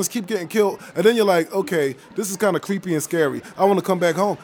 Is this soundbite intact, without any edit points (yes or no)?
yes